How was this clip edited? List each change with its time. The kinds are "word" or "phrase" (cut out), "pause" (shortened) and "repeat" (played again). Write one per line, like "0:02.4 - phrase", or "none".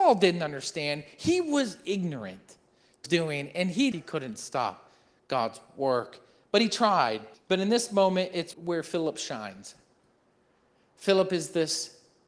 0:03.1 - phrase
0:03.9 - phrase
0:07.3 - pause
0:08.5 - word